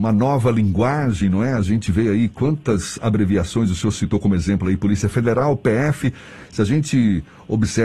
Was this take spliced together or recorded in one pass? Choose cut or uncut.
uncut